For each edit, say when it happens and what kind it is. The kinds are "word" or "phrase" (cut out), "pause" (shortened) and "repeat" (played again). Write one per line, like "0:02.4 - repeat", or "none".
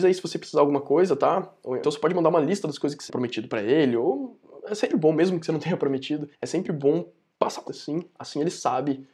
0:01.8 - word
0:03.1 - phrase
0:04.9 - word
0:06.3 - pause
0:07.3 - pause
0:07.7 - word